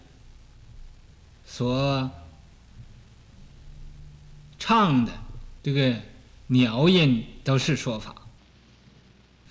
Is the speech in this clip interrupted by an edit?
yes; 2 cuts; at 1.1 s, 5.6 s

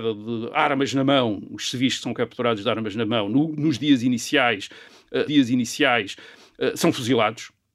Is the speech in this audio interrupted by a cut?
yes; 2 cuts; at 3.5 s, 5.3 s

